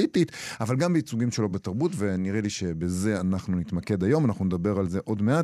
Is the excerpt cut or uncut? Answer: uncut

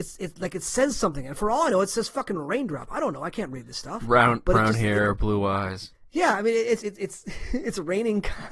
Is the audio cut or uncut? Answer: cut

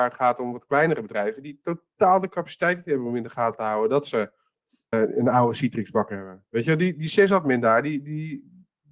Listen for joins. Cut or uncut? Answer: cut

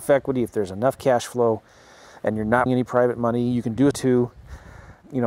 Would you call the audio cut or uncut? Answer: cut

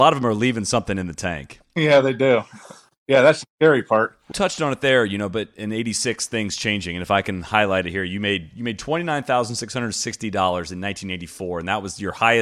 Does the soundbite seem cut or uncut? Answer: cut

